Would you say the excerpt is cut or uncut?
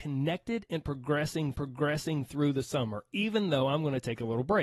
cut